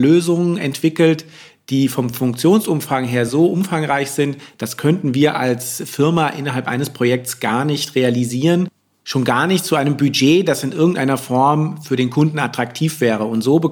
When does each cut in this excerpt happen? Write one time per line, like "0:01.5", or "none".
none